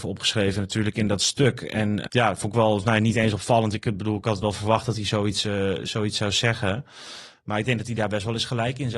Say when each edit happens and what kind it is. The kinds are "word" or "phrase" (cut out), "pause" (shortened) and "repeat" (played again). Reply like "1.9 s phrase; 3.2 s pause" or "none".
2.1 s word